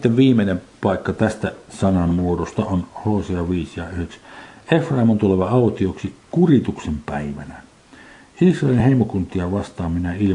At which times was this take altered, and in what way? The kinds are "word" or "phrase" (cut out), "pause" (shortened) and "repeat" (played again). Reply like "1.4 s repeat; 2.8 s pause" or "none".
none